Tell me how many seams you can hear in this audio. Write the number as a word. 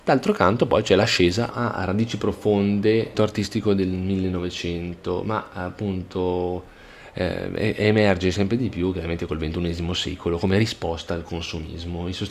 two